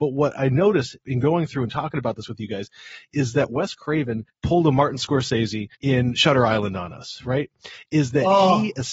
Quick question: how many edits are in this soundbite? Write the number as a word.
two